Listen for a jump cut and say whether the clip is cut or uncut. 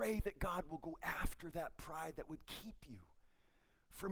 uncut